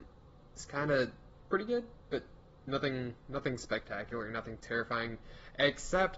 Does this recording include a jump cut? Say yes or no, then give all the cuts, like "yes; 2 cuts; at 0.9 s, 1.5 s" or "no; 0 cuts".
no; 0 cuts